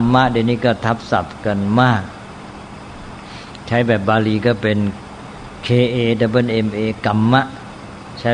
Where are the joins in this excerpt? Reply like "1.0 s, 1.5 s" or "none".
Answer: none